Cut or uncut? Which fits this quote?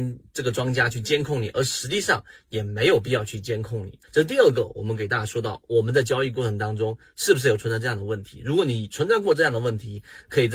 cut